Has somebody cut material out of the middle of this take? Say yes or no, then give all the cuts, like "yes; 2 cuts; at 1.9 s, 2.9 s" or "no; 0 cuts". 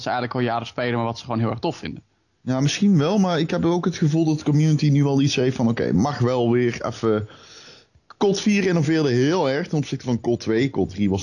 no; 0 cuts